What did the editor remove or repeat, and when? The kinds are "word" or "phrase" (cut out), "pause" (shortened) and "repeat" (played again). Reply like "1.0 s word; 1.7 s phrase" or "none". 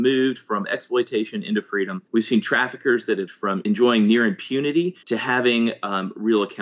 2.1 s pause; 3.3 s word; 5.0 s pause